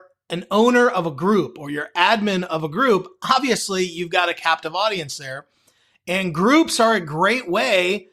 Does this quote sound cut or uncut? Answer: uncut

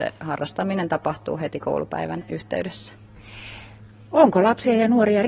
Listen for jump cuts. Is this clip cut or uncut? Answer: uncut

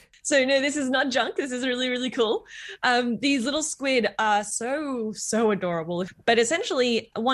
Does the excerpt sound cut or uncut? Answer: uncut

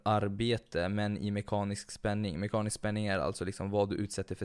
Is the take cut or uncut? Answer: uncut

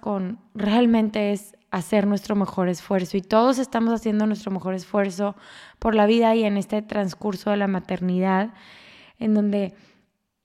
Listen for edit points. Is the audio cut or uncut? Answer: uncut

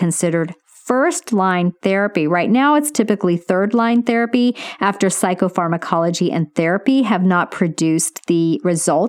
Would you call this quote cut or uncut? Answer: uncut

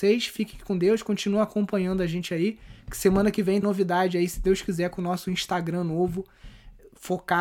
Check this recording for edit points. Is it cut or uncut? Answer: cut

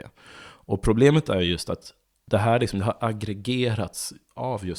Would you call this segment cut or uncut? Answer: cut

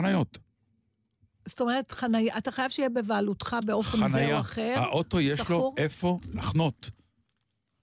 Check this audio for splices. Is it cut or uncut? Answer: uncut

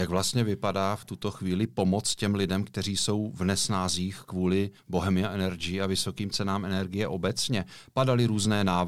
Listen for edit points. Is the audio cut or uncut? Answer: cut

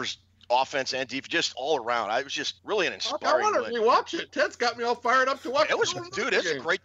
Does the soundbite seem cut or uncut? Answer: cut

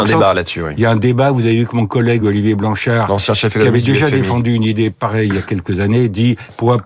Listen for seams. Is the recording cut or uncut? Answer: uncut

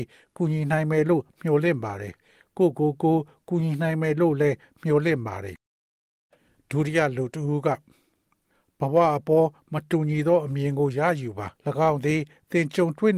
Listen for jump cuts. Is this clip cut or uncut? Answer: cut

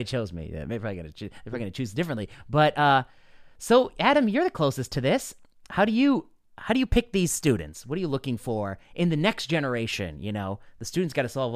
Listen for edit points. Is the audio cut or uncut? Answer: uncut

